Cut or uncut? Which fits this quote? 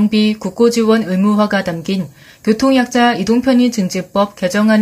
uncut